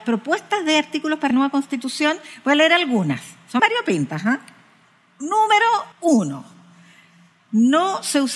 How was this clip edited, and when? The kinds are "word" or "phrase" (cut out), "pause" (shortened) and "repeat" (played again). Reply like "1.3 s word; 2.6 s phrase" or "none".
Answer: 1.3 s word; 3.6 s word; 5.9 s pause